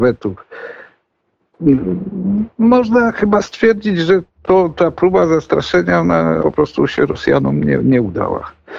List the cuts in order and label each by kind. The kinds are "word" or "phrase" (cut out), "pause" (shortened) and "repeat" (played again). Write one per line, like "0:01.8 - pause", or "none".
0:04.3 - word
0:06.4 - word